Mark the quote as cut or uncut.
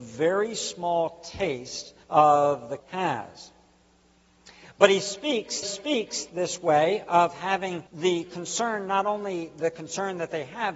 cut